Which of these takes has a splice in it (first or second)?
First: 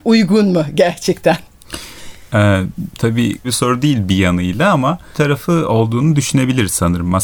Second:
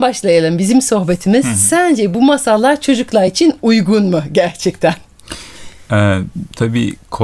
first